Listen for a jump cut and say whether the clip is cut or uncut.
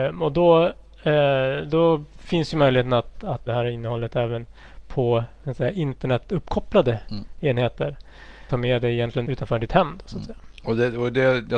cut